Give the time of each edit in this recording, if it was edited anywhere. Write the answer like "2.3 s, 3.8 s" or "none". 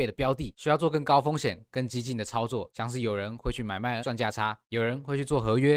4.0 s